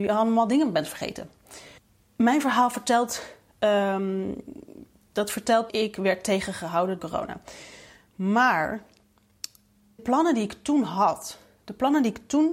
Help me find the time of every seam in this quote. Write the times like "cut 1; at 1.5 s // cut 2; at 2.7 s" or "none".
cut 1; at 5.7 s // cut 2; at 7.0 s // cut 3; at 10.0 s